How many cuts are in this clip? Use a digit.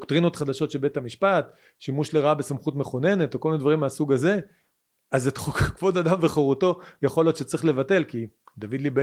0